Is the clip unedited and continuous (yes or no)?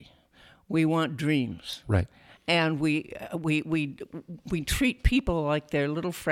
yes